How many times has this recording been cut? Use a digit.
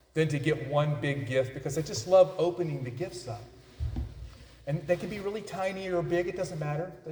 0